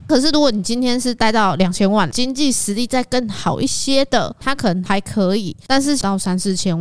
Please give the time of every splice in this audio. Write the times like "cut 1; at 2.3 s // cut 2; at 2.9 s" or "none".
none